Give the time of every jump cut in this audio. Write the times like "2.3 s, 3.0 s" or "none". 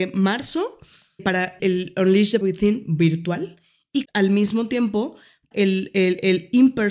1.2 s, 1.6 s, 2.4 s, 4.0 s, 5.5 s